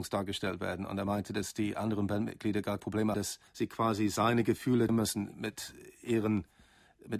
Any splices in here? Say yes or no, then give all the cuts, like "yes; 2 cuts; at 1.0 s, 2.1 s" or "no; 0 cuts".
yes; 4 cuts; at 2.8 s, 3.1 s, 3.5 s, 4.9 s